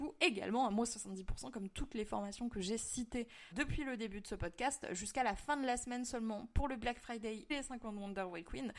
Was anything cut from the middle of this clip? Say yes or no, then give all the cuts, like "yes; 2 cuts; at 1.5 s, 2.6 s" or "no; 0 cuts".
yes; 2 cuts; at 3.5 s, 7.5 s